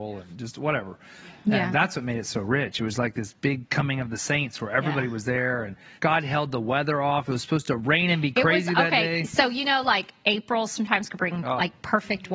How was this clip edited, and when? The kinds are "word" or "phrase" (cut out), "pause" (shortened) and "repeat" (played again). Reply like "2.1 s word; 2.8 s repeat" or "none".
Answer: 6.0 s pause